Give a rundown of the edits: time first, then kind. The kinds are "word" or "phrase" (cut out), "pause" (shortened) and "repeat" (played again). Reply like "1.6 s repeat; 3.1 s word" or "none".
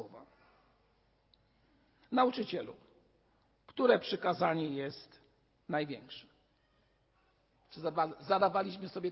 none